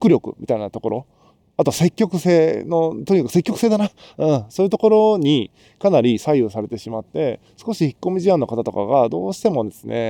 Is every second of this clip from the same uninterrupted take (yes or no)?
yes